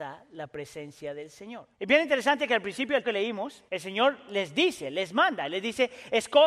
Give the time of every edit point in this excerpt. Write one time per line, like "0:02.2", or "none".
0:01.7
0:03.0
0:03.7